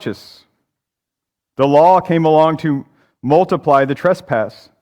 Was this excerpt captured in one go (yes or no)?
yes